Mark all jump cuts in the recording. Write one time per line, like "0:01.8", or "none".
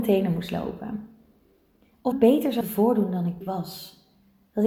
0:02.1
0:02.6
0:03.4